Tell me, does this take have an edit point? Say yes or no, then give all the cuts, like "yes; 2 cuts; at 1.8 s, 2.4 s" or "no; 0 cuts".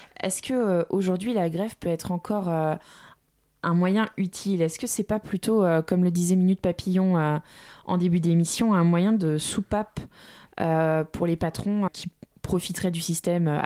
yes; 1 cut; at 11.9 s